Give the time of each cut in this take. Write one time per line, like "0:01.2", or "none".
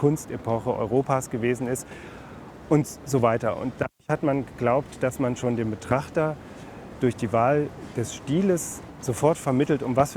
none